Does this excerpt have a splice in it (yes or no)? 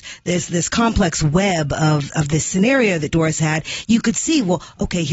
no